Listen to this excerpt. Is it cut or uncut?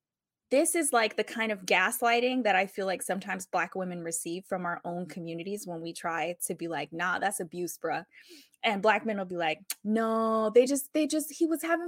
uncut